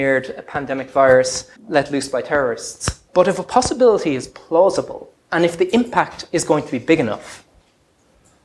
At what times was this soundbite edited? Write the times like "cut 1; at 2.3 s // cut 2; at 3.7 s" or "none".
cut 1; at 1.6 s // cut 2; at 3.1 s // cut 3; at 5.2 s